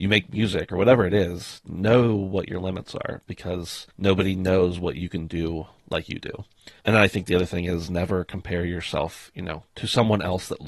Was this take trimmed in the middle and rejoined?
yes; 2 cuts; at 3.9 s, 6.8 s

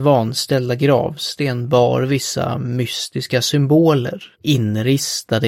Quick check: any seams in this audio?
yes; 1 cut; at 4.3 s

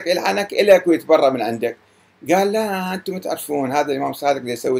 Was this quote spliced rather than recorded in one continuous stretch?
no; 0 cuts

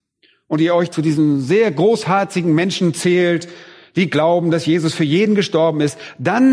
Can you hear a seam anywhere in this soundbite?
no; 0 cuts

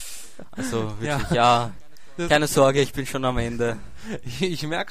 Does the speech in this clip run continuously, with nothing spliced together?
yes; 0 cuts

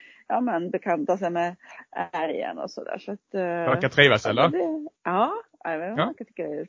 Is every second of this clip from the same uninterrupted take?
no; 1 cut; at 5.0 s

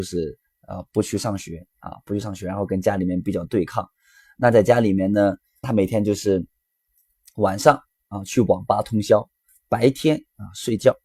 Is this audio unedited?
no; 1 cut; at 5.6 s

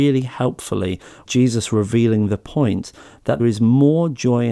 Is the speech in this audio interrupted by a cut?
yes; 2 cuts; at 1.3 s, 3.4 s

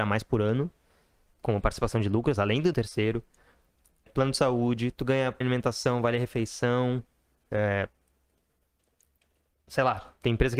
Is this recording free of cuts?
no; 3 cuts; at 2.7 s, 4.1 s, 5.4 s

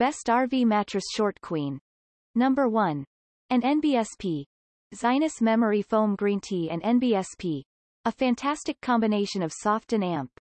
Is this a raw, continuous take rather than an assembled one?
yes; 0 cuts

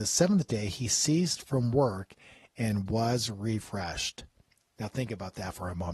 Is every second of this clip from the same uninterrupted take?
yes; 0 cuts

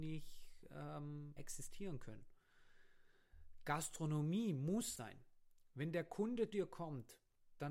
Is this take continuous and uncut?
no; 3 cuts; at 1.4 s, 5.0 s, 6.5 s

